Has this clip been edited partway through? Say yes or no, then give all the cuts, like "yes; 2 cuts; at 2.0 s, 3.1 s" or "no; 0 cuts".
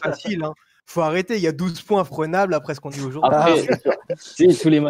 yes; 3 cuts; at 2.1 s, 2.9 s, 3.6 s